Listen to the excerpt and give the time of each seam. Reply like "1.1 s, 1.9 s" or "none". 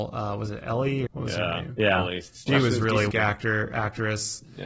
1.1 s, 2.5 s, 3.1 s